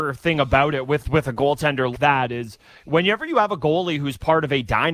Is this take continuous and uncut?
no; 1 cut; at 1.9 s

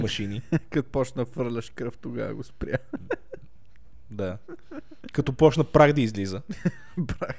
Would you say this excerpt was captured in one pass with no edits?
yes; 0 cuts

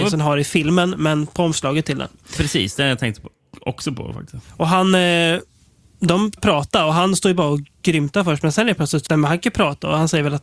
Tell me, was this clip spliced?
yes; 2 cuts; at 6.4 s, 9.1 s

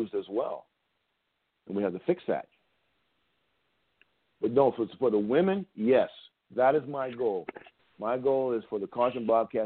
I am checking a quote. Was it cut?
no; 0 cuts

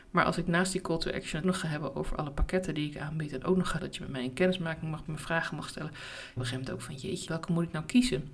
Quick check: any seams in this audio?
yes; 5 cuts; at 1.4 s, 3.8 s, 5.1 s, 6.4 s, 7.3 s

